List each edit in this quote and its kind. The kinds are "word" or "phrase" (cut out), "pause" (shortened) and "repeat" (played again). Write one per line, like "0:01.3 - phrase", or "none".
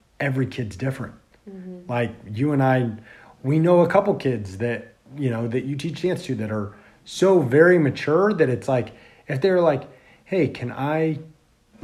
none